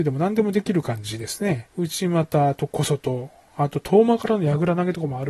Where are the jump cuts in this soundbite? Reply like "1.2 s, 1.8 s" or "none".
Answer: 1.7 s